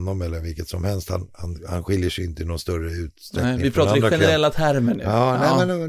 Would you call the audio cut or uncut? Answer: uncut